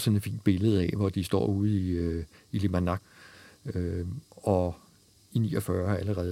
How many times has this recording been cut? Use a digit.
0